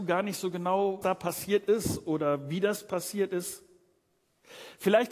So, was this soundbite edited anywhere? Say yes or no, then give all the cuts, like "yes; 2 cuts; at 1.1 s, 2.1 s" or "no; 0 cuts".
yes; 1 cut; at 1.0 s